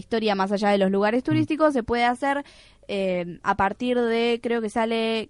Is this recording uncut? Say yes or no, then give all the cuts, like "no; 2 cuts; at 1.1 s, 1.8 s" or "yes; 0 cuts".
yes; 0 cuts